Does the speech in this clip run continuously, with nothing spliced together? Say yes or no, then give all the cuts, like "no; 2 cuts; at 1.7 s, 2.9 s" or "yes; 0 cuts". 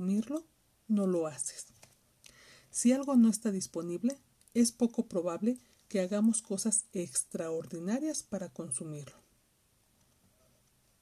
yes; 0 cuts